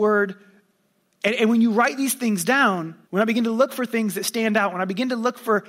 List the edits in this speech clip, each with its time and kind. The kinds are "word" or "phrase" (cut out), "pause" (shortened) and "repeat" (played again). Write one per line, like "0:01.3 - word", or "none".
0:03.1 - pause